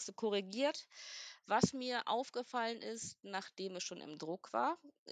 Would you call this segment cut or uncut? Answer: uncut